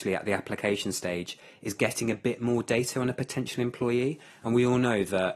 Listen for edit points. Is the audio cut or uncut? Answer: uncut